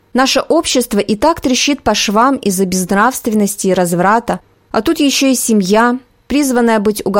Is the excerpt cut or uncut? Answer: uncut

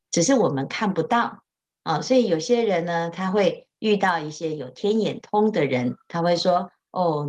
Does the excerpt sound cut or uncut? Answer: uncut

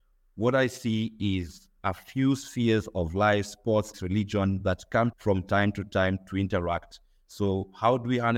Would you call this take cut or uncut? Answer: cut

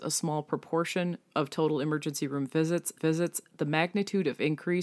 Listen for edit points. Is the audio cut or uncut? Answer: cut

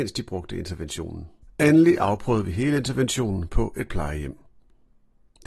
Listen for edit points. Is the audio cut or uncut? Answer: uncut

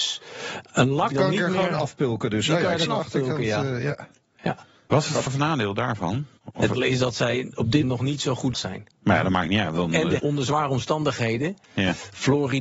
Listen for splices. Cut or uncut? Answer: cut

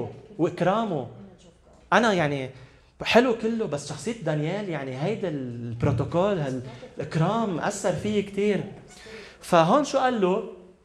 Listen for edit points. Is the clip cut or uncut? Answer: uncut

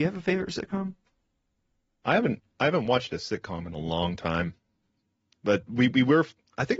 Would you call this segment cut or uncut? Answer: uncut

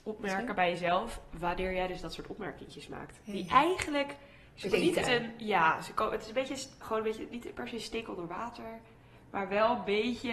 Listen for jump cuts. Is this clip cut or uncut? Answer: cut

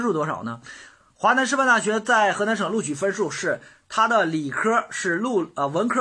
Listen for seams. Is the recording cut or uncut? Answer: uncut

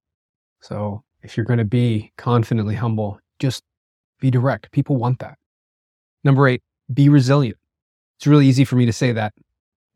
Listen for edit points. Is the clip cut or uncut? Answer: uncut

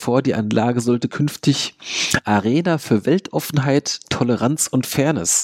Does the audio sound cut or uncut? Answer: uncut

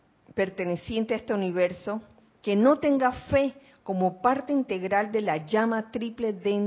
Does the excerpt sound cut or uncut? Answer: uncut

